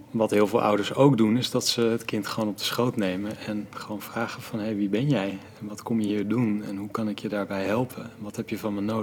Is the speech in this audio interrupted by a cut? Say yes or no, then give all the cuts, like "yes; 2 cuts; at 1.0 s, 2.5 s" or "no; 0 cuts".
no; 0 cuts